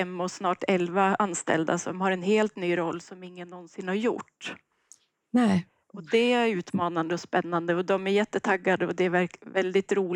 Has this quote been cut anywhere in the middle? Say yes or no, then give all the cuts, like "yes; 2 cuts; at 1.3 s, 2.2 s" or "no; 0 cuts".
no; 0 cuts